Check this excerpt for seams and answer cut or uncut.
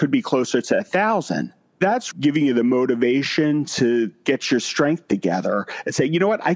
cut